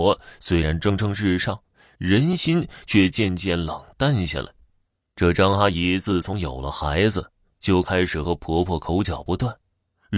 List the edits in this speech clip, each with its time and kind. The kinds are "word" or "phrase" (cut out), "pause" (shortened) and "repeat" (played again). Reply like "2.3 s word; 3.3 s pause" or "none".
none